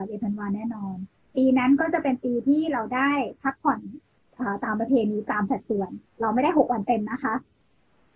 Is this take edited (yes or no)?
yes